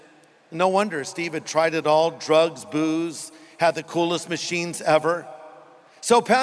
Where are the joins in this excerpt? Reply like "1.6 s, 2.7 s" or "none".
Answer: none